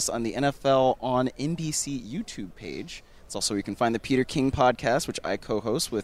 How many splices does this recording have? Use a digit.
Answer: 0